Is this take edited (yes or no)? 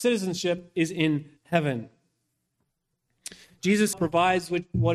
yes